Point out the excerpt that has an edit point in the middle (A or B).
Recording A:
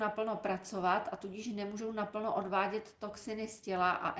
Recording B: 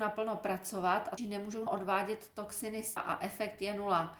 B